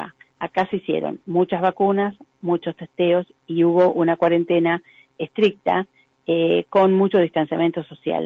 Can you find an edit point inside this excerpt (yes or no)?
no